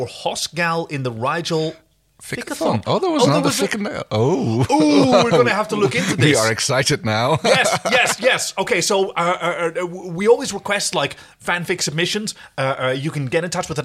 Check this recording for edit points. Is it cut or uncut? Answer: uncut